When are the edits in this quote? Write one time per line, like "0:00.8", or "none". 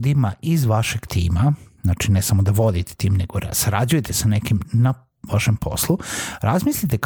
none